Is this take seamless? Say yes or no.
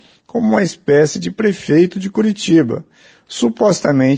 yes